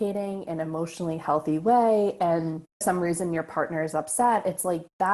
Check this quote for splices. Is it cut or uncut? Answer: cut